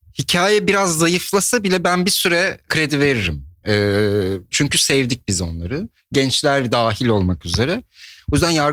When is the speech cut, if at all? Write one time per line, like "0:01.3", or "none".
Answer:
0:02.7
0:04.5